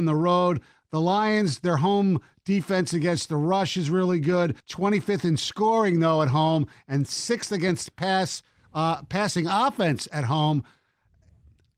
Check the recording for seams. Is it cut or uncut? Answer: cut